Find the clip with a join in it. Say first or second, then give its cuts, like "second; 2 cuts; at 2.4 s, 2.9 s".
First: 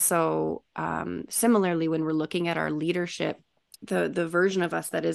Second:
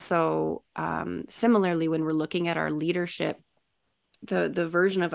first; 1 cut; at 3.7 s